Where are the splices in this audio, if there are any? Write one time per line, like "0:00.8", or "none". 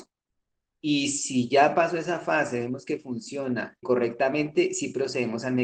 0:03.8